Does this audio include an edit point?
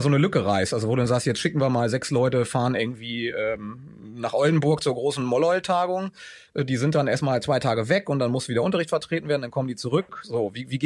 no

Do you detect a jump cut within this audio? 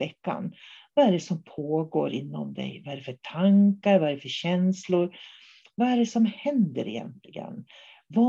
no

